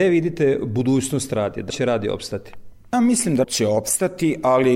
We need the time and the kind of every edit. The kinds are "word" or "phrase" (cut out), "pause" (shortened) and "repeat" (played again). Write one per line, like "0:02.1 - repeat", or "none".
0:01.7 - word
0:02.9 - word
0:03.4 - word